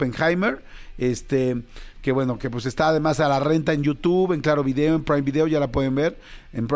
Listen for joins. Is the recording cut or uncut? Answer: uncut